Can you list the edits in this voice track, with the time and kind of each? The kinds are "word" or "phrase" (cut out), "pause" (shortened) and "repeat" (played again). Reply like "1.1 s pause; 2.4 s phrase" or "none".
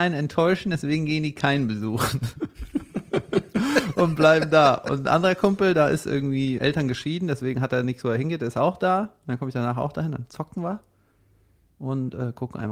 6.6 s word